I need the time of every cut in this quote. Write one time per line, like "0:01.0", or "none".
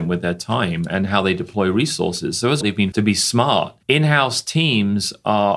0:02.6
0:02.9
0:03.8

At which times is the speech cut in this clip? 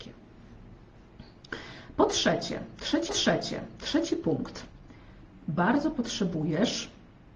0:03.1

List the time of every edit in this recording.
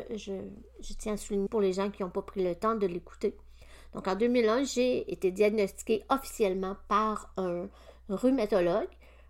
0:01.5

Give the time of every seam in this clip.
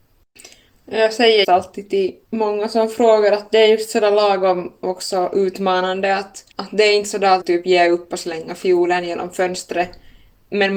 0:01.4
0:02.2
0:06.5
0:07.4

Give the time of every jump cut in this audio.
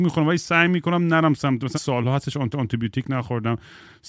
0:01.7
0:02.5

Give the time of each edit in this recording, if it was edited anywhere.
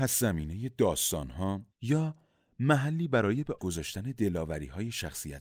0:01.7
0:03.6

